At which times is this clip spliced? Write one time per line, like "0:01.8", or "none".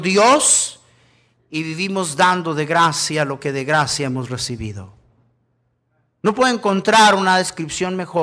none